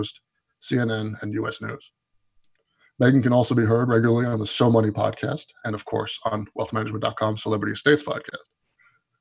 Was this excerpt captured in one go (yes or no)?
yes